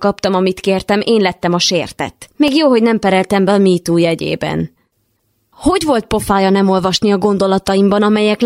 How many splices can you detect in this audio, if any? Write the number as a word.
zero